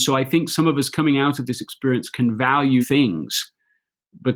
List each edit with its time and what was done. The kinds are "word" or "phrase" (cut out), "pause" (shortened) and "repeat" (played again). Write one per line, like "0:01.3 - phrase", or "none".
0:02.8 - word